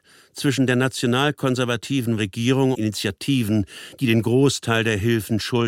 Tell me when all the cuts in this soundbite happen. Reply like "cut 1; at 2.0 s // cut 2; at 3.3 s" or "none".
cut 1; at 2.2 s // cut 2; at 2.7 s